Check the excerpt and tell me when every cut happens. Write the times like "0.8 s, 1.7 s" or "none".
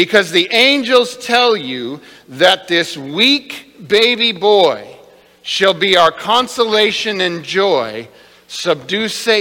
none